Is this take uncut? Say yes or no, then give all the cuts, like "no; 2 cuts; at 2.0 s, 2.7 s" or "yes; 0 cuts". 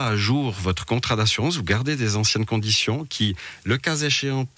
yes; 0 cuts